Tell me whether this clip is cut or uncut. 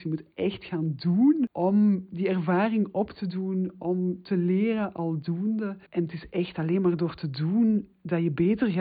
cut